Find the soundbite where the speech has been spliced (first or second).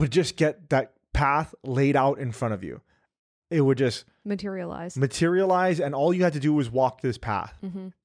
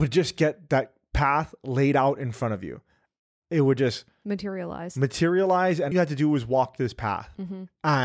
second